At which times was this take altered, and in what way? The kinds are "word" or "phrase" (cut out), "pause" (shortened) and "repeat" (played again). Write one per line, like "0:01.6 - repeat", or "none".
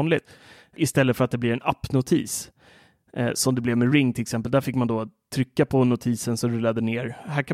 none